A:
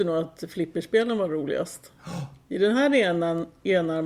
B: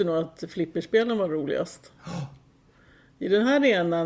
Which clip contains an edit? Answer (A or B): A